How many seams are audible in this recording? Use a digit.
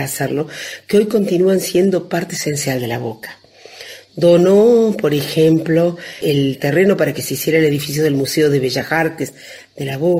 0